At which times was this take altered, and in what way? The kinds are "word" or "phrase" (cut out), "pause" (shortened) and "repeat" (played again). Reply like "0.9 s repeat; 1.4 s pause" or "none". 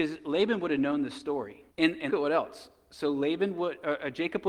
1.7 s pause; 2.1 s word